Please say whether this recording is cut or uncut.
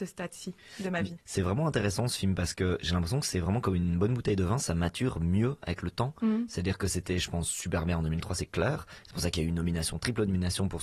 uncut